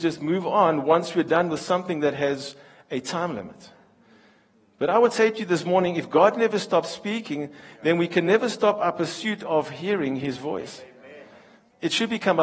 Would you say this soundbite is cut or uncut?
uncut